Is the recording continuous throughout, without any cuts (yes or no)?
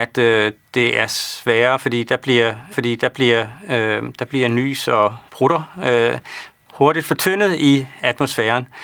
no